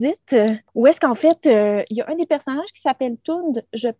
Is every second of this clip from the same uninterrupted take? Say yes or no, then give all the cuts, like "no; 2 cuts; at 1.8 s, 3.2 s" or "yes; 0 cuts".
yes; 0 cuts